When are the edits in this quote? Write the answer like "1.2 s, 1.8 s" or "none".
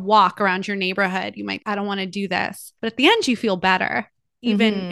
1.6 s, 2.8 s